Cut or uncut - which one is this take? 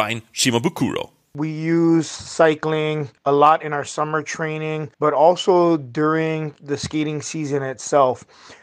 cut